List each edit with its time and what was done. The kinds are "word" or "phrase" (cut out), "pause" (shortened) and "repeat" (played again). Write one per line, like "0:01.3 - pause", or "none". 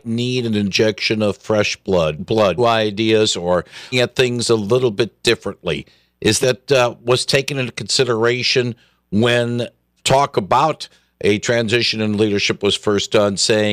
0:02.2 - word
0:02.6 - word
0:03.9 - word
0:06.4 - phrase
0:10.0 - word